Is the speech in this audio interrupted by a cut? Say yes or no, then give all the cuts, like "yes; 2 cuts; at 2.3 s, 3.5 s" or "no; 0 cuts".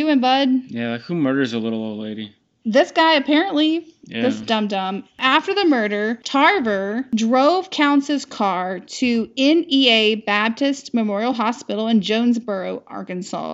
no; 0 cuts